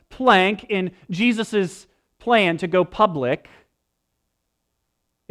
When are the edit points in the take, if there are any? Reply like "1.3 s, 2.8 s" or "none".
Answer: none